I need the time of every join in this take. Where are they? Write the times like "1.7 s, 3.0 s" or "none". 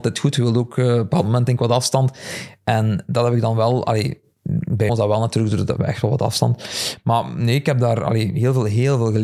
4.9 s, 5.8 s